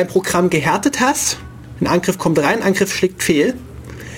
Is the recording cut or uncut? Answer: uncut